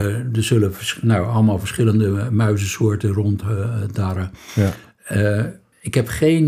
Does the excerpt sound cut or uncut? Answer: uncut